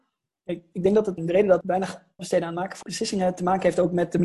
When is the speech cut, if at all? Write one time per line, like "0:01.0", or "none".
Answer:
0:01.2
0:01.6
0:02.2
0:02.8